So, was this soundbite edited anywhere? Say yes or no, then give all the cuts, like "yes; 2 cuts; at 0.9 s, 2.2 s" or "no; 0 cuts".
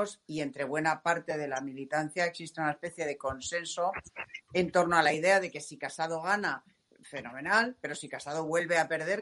no; 0 cuts